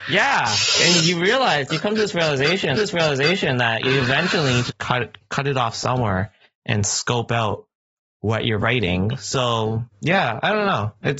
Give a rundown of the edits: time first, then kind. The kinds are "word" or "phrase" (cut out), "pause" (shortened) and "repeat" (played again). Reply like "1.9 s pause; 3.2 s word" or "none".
1.0 s word; 2.7 s repeat; 4.7 s word; 9.9 s pause